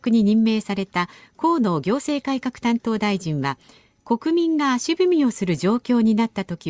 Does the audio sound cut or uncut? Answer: uncut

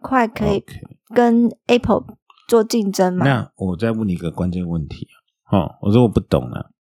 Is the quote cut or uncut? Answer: uncut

